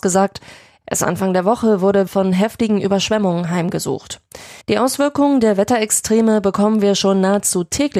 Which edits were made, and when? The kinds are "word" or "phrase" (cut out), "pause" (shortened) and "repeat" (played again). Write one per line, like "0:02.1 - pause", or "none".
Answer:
0:02.1 - word
0:04.6 - pause